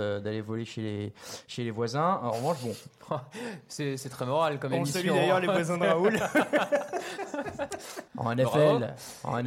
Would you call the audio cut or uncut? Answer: cut